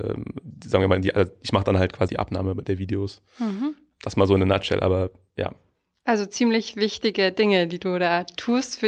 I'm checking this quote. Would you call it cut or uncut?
cut